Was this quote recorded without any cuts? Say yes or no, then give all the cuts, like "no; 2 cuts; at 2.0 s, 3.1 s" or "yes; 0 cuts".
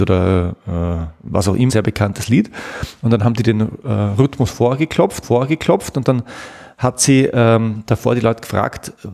no; 2 cuts; at 1.7 s, 5.2 s